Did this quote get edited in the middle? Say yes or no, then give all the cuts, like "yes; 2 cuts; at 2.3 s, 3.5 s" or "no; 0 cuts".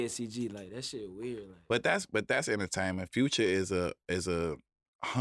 no; 0 cuts